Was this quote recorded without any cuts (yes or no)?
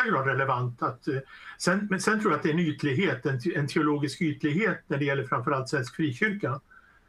yes